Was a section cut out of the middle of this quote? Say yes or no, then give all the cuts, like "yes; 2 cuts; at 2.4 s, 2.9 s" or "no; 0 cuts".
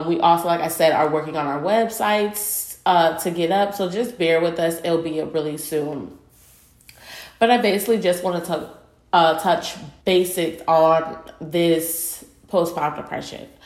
yes; 1 cut; at 10.0 s